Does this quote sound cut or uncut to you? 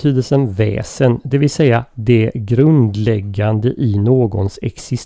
uncut